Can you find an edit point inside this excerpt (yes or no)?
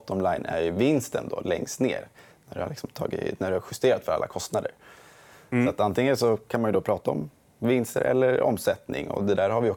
no